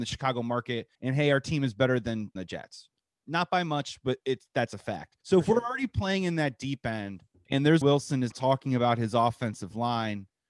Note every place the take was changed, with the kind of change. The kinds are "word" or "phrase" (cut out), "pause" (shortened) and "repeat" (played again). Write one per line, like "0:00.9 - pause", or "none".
0:00.9 - pause
0:02.4 - phrase
0:05.2 - pause
0:07.8 - phrase
0:08.3 - word